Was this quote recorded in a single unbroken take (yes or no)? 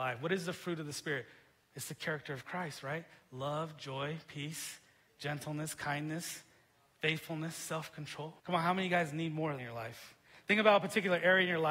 no